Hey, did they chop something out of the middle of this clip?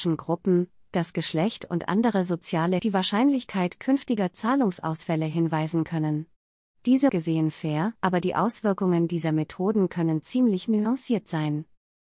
yes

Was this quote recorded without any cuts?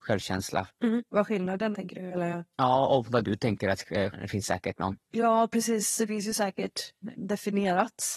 no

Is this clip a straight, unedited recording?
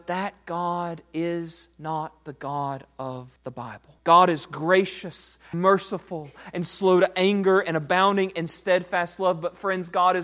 no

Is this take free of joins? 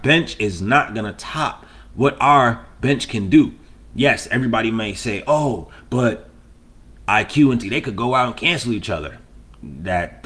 no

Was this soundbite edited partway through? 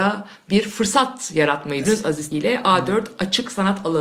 yes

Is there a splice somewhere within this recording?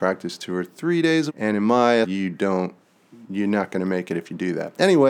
yes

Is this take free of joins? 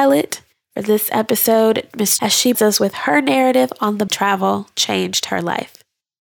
no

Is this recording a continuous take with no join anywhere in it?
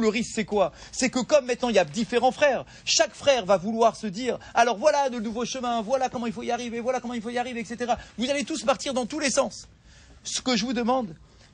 yes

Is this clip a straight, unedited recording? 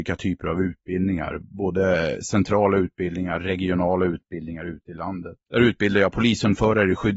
no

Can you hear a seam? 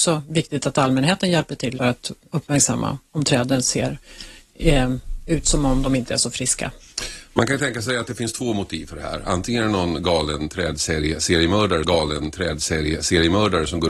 yes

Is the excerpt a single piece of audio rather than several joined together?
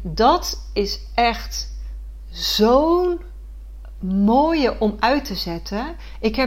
yes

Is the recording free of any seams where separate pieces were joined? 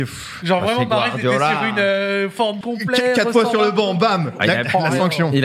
no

